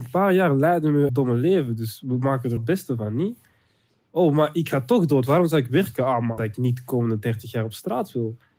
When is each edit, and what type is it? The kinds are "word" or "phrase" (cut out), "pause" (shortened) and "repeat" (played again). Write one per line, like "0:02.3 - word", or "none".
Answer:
0:01.1 - word
0:02.6 - word
0:06.4 - word